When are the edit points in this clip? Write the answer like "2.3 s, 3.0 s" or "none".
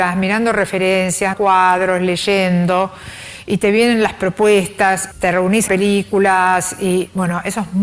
1.3 s, 5.1 s, 5.7 s